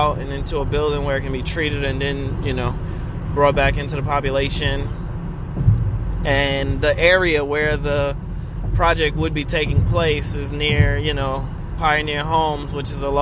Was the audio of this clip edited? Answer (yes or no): no